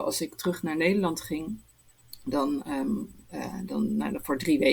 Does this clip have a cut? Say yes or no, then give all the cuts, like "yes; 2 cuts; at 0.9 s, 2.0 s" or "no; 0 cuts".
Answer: no; 0 cuts